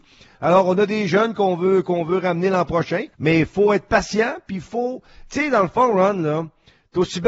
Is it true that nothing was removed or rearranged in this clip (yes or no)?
no